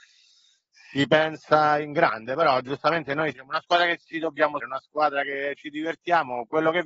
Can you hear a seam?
yes; 2 cuts; at 3.3 s, 4.6 s

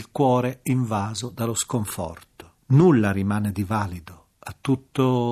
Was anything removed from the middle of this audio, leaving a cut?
yes; 1 cut; at 2.6 s

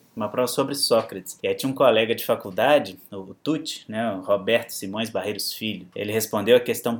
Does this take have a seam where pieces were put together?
no; 0 cuts

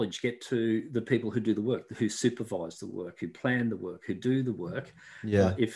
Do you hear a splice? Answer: no; 0 cuts

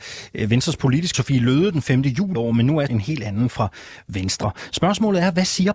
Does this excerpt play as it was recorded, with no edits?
no; 3 cuts; at 1.1 s, 2.3 s, 2.9 s

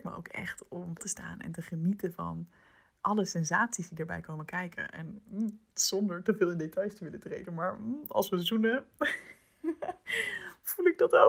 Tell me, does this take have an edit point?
yes; 1 cut; at 1.0 s

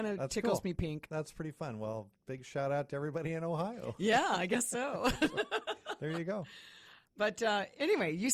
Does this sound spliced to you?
no; 0 cuts

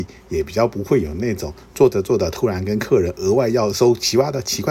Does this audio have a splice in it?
no; 0 cuts

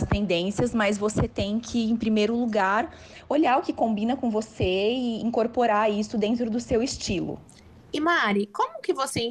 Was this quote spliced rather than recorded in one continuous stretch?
no; 0 cuts

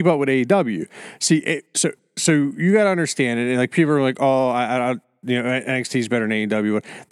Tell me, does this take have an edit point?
no; 0 cuts

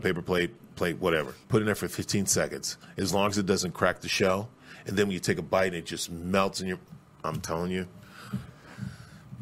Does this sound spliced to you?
yes; 1 cut; at 1.4 s

